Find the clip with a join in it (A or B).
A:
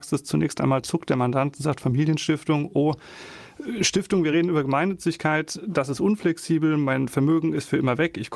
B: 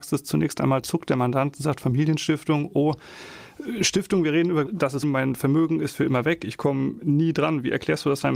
B